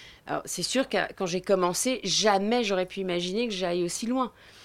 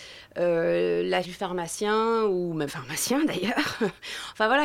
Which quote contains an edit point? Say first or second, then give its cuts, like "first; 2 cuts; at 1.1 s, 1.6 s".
second; 2 cuts; at 1.2 s, 2.7 s